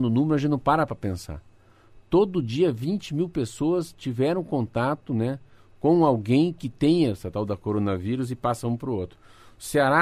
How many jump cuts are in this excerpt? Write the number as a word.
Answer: zero